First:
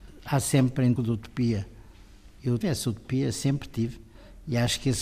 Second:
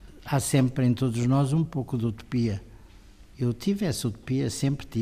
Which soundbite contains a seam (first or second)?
first